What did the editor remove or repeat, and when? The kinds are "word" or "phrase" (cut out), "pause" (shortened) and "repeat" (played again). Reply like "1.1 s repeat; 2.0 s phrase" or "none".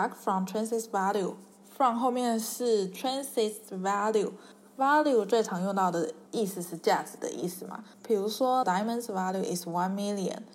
6.3 s pause; 8.6 s word